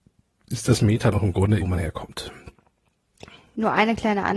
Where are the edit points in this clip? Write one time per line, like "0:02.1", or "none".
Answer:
0:01.1
0:01.6